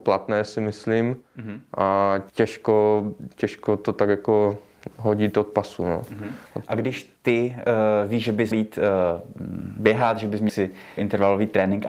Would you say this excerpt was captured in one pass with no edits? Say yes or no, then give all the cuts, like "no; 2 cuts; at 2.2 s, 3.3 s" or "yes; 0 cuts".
no; 6 cuts; at 2.3 s, 6.5 s, 7.2 s, 8.5 s, 10.5 s, 11.0 s